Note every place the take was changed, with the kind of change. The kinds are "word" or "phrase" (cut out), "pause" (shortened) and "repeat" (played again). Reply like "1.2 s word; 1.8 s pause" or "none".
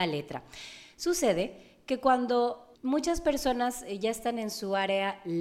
2.8 s pause